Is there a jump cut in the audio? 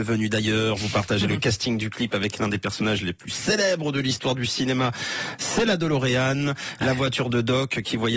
no; 0 cuts

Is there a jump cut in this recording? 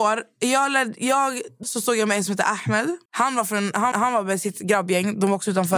yes; 3 cuts; at 1.6 s, 3.1 s, 3.9 s

